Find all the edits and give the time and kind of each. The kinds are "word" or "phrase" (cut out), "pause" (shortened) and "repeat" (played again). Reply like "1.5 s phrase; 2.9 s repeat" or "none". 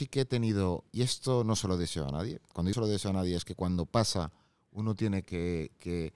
2.7 s word; 5.2 s word